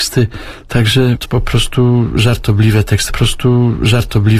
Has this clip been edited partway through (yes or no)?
yes